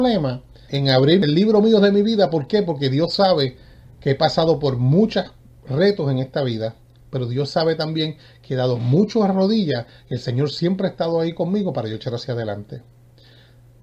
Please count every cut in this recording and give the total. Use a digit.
0